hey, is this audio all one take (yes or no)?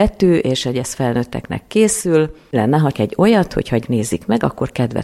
no